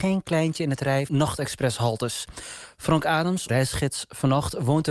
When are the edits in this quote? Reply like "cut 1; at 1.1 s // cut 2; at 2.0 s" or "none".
cut 1; at 1.1 s // cut 2; at 3.5 s